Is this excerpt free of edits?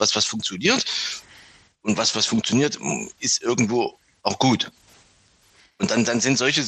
yes; 0 cuts

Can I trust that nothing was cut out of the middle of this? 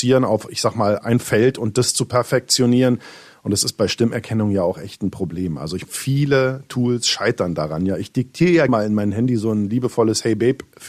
no; 3 cuts; at 1.0 s, 5.8 s, 8.7 s

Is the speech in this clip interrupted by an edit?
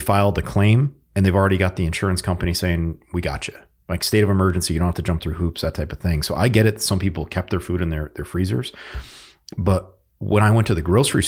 no; 0 cuts

